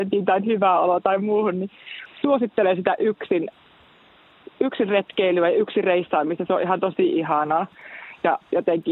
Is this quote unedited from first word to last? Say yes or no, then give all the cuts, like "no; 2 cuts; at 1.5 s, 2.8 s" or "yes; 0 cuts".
yes; 0 cuts